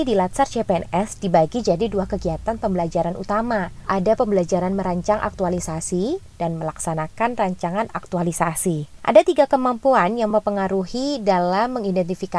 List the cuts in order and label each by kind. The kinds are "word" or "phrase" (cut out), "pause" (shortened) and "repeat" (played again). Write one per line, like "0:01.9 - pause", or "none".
none